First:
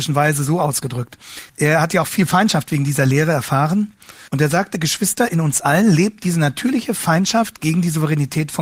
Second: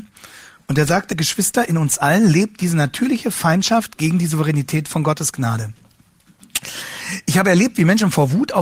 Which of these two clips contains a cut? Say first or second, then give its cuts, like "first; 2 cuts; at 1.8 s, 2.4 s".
first; 2 cuts; at 1.5 s, 4.3 s